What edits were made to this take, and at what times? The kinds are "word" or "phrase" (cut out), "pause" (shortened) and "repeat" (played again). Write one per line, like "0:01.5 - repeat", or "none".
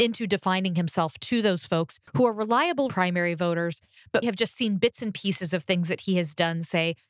0:02.1 - pause
0:02.9 - word
0:04.2 - word